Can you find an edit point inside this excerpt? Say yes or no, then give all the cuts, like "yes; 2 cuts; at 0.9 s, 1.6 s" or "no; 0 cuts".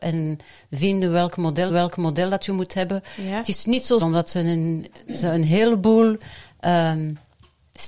yes; 2 cuts; at 1.7 s, 4.0 s